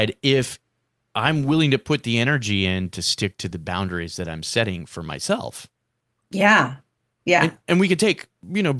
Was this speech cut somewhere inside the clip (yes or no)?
no